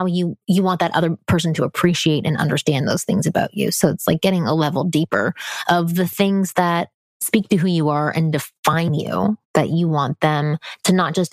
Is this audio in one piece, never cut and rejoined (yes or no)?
yes